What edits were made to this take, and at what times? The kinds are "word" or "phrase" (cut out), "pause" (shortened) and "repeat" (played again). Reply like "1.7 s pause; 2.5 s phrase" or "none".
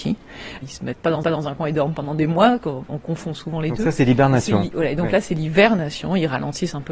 1.2 s repeat